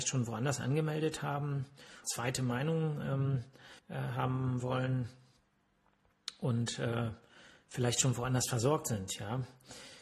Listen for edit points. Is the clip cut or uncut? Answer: cut